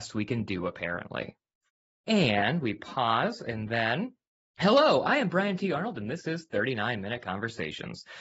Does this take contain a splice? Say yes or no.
yes